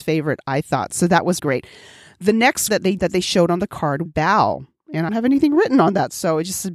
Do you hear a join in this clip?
yes; 5 cuts; at 1.4 s, 2.7 s, 3.0 s, 4.1 s, 5.1 s

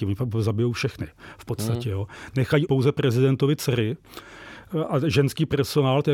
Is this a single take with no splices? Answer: no; 1 cut; at 2.7 s

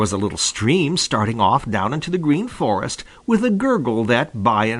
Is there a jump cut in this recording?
no; 0 cuts

